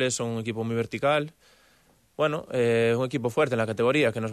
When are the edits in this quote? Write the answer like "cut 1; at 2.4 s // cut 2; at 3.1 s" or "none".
none